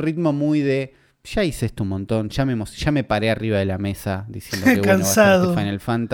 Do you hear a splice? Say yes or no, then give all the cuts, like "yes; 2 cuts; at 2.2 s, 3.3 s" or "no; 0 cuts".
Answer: no; 0 cuts